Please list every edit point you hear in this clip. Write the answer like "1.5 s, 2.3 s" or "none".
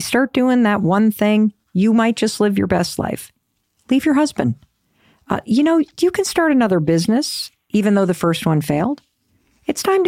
none